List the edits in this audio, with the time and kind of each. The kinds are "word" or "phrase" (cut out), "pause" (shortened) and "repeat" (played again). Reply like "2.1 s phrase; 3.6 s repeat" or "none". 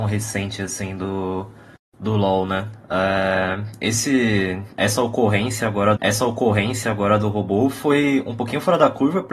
1.8 s pause; 6.0 s repeat